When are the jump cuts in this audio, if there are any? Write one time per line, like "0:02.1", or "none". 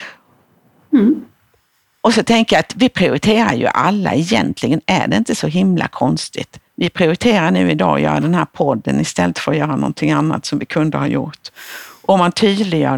0:06.7